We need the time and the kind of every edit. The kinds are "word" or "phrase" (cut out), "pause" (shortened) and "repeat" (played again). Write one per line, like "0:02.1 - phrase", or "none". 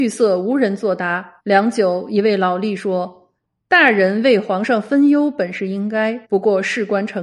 0:01.4 - pause
0:03.4 - pause
0:06.2 - pause